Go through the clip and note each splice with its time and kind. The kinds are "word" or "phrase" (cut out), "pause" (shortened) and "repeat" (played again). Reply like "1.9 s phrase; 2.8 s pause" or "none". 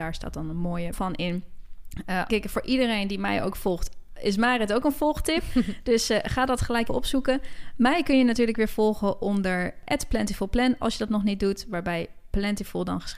0.9 s word; 2.3 s phrase; 6.9 s word